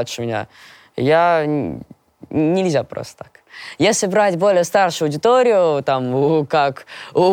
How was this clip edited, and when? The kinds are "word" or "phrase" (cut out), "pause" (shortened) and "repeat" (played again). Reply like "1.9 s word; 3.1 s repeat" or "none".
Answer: none